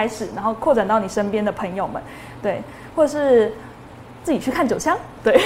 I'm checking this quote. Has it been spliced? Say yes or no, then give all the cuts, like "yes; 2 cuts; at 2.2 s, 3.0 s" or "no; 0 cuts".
no; 0 cuts